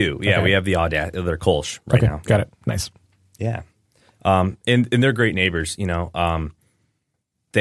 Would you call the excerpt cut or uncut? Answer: uncut